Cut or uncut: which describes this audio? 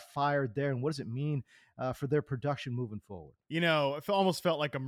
uncut